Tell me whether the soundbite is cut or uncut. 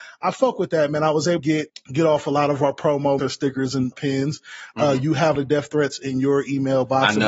cut